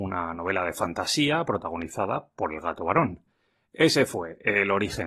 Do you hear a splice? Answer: no; 0 cuts

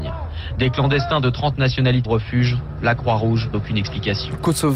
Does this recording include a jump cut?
yes; 2 cuts; at 2.0 s, 3.5 s

